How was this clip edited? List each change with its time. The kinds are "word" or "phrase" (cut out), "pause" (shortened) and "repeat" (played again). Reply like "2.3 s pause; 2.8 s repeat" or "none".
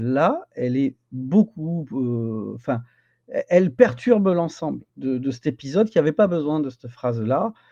4.9 s pause